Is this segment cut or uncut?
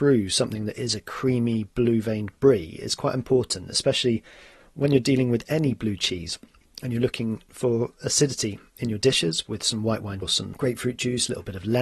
cut